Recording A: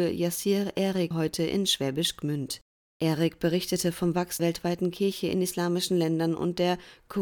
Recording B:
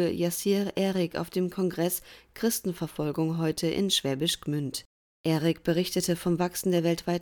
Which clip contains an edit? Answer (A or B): A